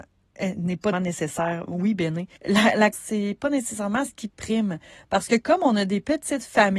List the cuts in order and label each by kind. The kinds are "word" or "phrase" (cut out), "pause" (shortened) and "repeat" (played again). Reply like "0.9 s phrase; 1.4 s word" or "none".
0.9 s word; 2.4 s pause; 2.9 s word